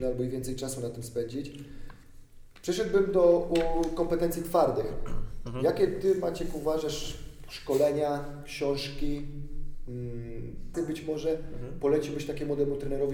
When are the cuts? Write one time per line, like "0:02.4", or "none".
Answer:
0:10.7